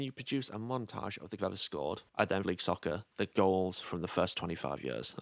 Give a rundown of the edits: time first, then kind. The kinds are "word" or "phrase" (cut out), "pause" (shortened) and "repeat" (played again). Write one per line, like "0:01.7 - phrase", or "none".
0:01.4 - phrase
0:02.1 - pause
0:02.4 - phrase
0:03.1 - pause